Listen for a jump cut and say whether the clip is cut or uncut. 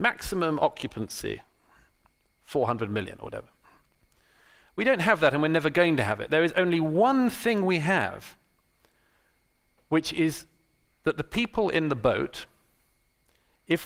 uncut